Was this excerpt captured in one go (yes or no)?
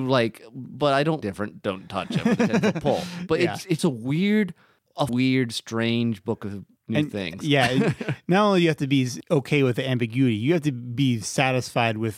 no